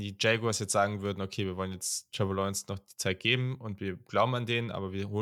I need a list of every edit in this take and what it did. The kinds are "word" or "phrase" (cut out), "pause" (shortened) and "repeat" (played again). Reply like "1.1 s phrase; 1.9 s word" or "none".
none